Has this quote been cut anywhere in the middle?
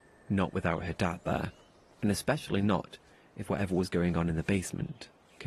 no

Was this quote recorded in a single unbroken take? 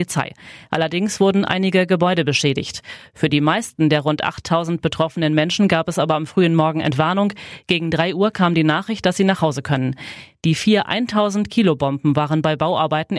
yes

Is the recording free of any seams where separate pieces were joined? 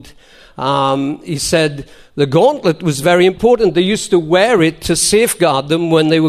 yes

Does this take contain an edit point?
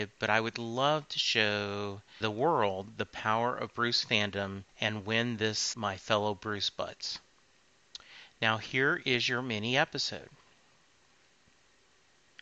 yes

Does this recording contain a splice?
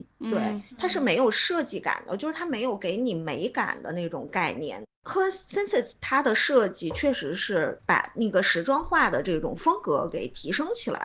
no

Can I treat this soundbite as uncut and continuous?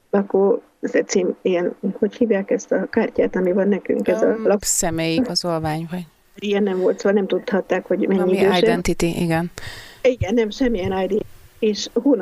yes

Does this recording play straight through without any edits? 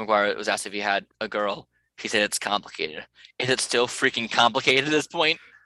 no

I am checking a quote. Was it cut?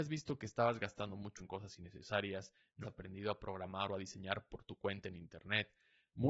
yes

